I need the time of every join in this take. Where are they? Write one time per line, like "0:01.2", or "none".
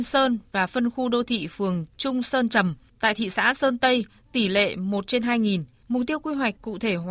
none

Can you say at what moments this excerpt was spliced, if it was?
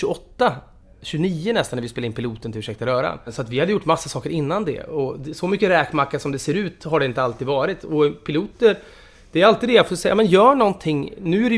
none

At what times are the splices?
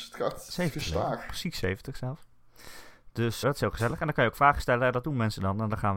0:03.4

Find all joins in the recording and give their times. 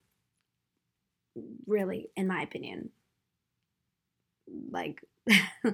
none

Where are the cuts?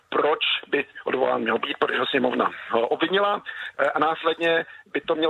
none

